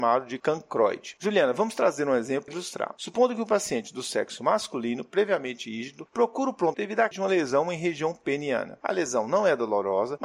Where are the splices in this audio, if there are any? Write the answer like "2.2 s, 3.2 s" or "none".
2.5 s, 6.7 s, 7.1 s